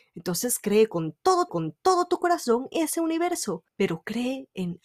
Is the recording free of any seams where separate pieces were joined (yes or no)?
no